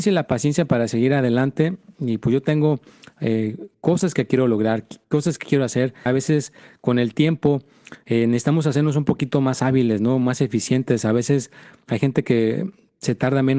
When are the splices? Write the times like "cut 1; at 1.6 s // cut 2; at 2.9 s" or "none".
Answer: cut 1; at 6.1 s